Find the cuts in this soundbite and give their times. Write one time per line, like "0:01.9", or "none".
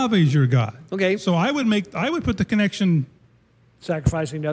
none